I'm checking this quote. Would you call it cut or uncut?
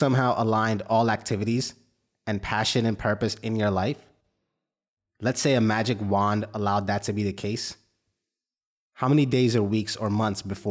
uncut